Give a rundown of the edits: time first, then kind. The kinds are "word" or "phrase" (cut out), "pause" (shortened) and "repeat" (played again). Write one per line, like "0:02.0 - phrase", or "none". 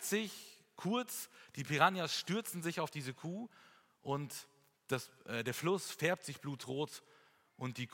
none

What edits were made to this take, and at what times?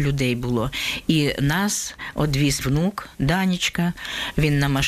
0:02.6 - word
0:03.1 - pause

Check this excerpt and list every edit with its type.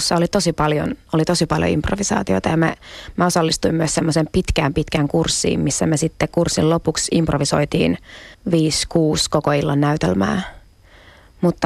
0:08.3 - pause

